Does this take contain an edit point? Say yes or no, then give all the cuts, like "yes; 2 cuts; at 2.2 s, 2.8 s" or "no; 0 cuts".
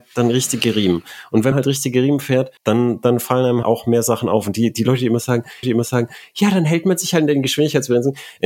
yes; 4 cuts; at 1.5 s, 2.6 s, 3.6 s, 5.6 s